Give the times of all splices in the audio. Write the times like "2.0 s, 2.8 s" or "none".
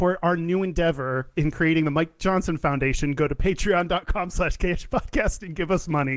none